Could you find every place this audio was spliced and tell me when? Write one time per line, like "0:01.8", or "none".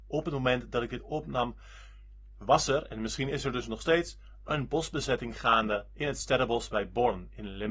none